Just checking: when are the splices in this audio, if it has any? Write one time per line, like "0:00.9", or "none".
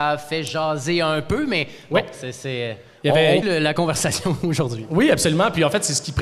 0:03.4